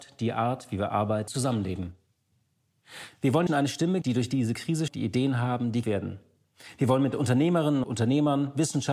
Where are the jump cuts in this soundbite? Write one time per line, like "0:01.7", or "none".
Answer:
0:01.3
0:03.5
0:04.0
0:04.9
0:05.8
0:07.8